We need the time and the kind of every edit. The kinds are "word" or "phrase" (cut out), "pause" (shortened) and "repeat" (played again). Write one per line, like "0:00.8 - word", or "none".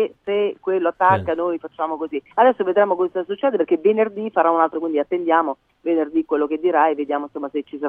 0:02.3 - pause
0:04.7 - word